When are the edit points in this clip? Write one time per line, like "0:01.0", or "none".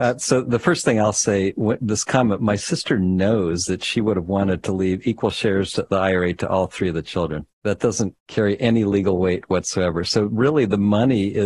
0:07.5
0:08.2